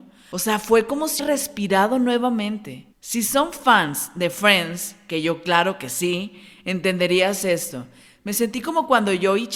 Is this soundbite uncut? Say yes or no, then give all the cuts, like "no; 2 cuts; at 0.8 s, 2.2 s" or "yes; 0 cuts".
no; 2 cuts; at 1.2 s, 2.9 s